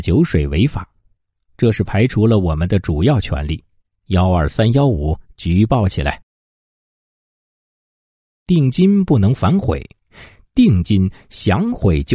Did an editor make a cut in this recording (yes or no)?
no